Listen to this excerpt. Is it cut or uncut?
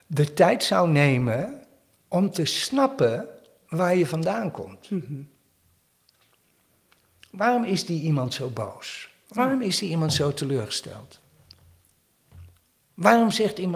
uncut